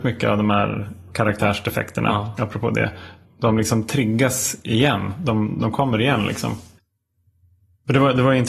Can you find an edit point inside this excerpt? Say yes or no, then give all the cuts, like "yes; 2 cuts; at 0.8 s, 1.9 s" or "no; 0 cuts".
no; 0 cuts